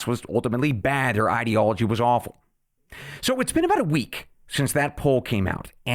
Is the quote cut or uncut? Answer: uncut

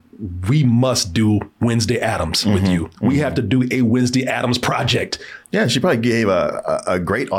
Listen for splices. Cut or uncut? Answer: cut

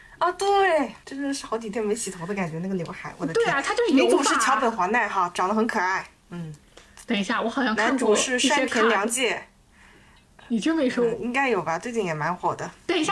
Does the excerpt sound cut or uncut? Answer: cut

